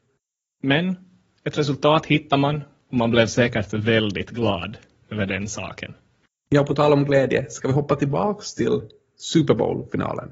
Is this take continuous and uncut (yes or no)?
yes